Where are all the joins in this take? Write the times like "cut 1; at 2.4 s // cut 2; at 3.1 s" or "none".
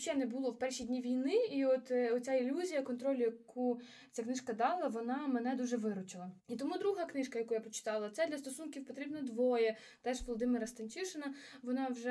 cut 1; at 6.4 s